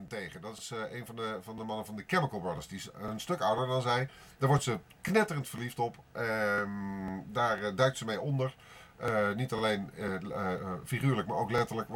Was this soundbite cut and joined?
no; 0 cuts

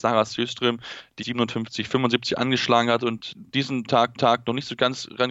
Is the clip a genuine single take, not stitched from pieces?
no; 3 cuts; at 1.2 s, 3.3 s, 4.1 s

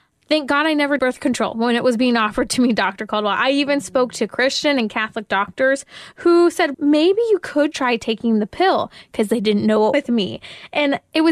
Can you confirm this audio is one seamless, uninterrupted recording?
no; 4 cuts; at 1.0 s, 6.7 s, 7.7 s, 9.9 s

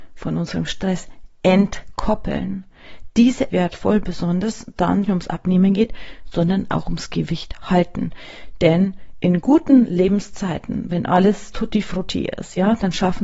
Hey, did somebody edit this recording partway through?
yes; 2 cuts; at 3.5 s, 5.0 s

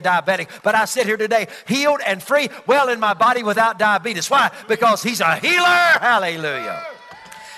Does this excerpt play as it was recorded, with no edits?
yes; 0 cuts

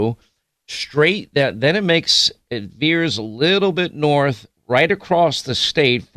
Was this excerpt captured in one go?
yes; 0 cuts

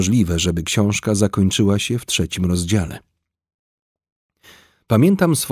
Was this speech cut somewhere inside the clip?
no; 0 cuts

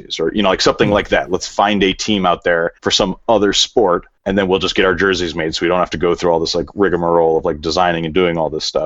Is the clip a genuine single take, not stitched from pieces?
no; 2 cuts; at 2.8 s, 4.2 s

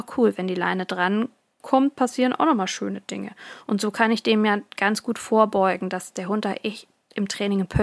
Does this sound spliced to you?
no; 0 cuts

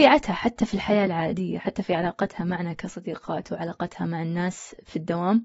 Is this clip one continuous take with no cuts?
yes; 0 cuts

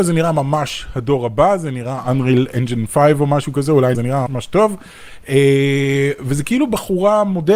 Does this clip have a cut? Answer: yes; 2 cuts; at 3.9 s, 4.3 s

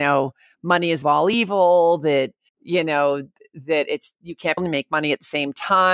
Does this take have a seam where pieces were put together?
yes; 3 cuts; at 1.0 s, 2.5 s, 4.6 s

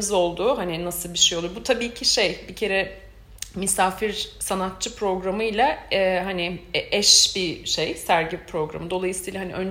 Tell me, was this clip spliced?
no; 0 cuts

